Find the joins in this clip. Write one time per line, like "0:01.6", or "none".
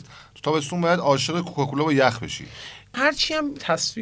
none